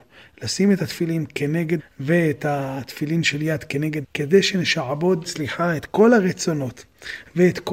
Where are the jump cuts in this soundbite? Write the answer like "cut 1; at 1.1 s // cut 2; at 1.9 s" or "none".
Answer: cut 1; at 1.8 s // cut 2; at 4.0 s // cut 3; at 5.2 s